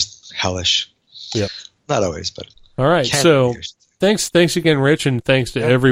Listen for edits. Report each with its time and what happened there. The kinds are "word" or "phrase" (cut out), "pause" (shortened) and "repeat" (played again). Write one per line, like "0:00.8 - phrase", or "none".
none